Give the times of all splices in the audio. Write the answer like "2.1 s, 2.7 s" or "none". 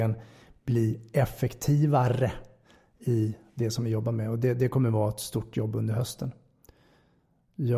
none